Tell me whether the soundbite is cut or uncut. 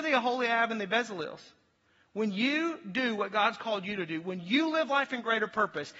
uncut